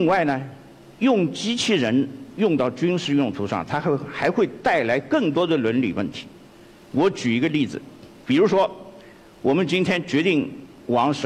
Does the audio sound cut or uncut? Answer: uncut